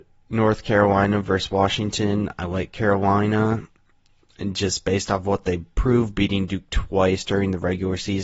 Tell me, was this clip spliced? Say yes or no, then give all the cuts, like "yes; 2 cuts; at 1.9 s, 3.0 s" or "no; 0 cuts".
no; 0 cuts